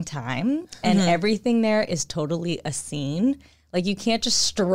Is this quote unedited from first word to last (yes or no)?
yes